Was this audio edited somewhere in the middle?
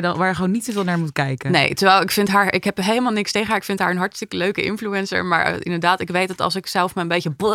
no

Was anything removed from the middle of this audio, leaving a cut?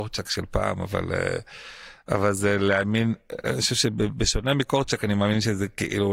no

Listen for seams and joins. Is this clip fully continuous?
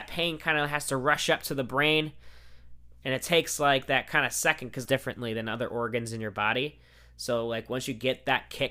no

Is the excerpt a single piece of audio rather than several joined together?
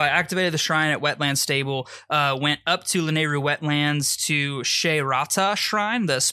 yes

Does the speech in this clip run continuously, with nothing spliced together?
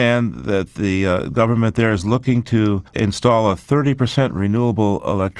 no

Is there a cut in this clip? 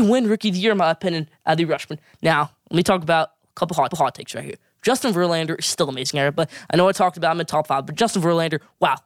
yes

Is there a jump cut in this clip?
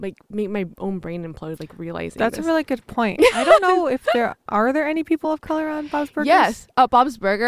no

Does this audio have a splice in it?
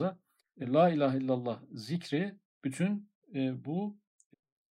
no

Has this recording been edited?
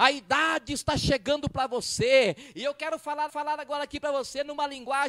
yes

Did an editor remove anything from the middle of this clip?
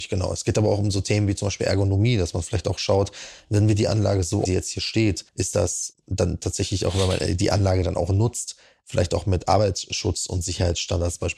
yes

